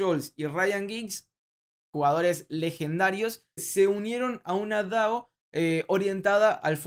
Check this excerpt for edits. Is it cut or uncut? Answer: cut